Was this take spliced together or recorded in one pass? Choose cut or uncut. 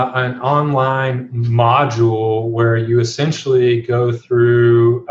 uncut